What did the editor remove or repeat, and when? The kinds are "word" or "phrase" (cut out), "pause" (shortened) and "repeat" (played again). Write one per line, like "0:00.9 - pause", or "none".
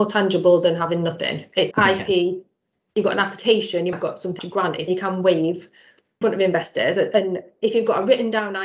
0:01.7 - word
0:03.9 - word
0:04.4 - word
0:04.9 - word
0:06.2 - word